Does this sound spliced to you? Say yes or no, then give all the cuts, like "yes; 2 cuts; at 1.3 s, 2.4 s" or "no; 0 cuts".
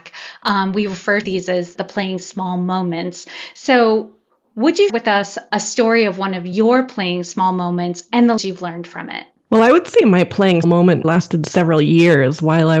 yes; 6 cuts; at 1.2 s, 1.8 s, 4.9 s, 8.4 s, 10.6 s, 11.0 s